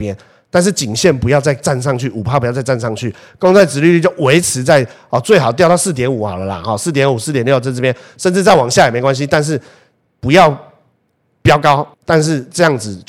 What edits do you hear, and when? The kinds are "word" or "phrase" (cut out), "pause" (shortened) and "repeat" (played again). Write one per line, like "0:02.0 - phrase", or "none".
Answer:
0:11.9 - pause